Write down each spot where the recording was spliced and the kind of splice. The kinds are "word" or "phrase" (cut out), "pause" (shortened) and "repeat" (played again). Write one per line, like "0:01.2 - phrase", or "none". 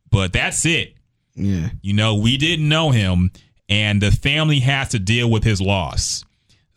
none